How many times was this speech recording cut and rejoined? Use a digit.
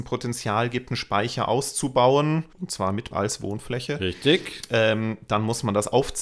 2